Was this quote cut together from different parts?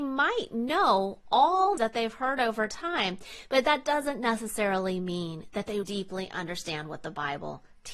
yes; 2 cuts; at 1.8 s, 5.8 s

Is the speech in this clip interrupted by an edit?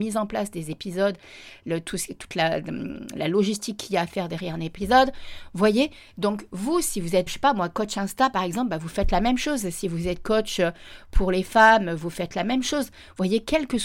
yes; 1 cut; at 7.3 s

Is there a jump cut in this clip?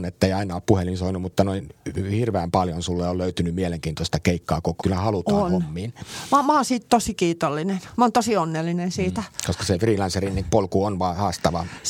yes; 2 cuts; at 4.8 s, 10.4 s

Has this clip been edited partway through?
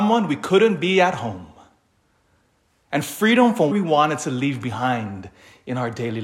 yes; 1 cut; at 3.7 s

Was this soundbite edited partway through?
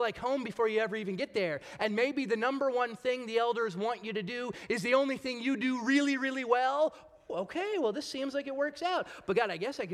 no; 0 cuts

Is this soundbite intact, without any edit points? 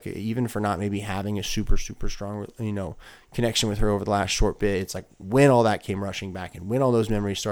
yes; 0 cuts

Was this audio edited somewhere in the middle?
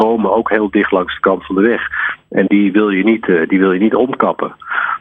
yes; 1 cut; at 2.5 s

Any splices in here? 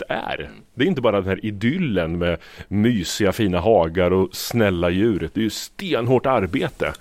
no; 0 cuts

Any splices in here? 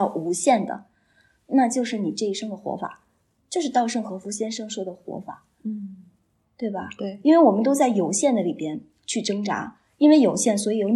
no; 0 cuts

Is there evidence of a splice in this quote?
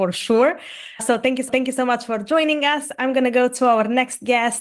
yes; 1 cut; at 1.5 s

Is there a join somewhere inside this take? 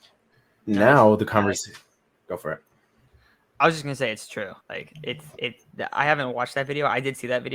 yes; 1 cut; at 4.6 s

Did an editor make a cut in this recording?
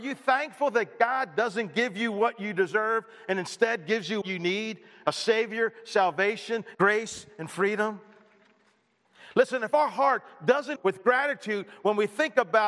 yes; 3 cuts; at 4.2 s, 6.7 s, 10.8 s

